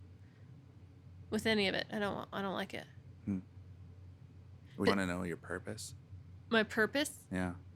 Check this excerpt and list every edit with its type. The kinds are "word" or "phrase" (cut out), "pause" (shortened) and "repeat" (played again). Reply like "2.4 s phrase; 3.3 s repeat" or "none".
4.9 s word